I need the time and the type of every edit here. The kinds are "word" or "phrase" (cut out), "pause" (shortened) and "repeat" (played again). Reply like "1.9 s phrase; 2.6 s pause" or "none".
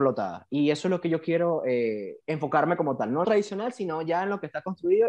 2.2 s pause; 3.2 s word

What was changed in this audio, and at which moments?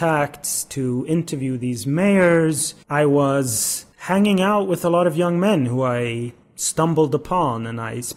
2.8 s pause; 3.9 s pause; 6.4 s pause

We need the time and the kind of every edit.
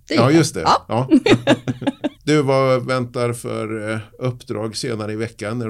2.1 s pause

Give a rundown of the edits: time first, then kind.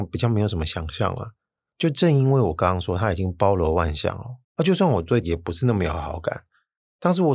4.4 s pause; 5.2 s word

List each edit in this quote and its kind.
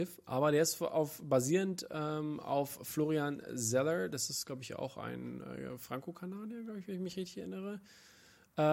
none

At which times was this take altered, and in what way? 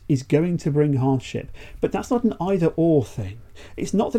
none

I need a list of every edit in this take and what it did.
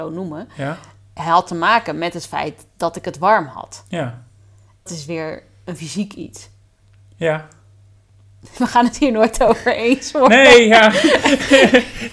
4.9 s word

